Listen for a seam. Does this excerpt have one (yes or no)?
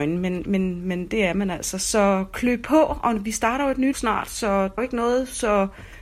yes